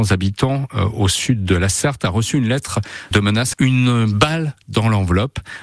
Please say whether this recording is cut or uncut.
cut